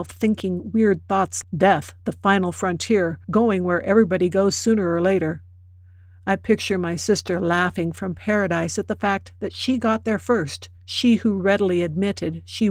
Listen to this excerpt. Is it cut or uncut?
cut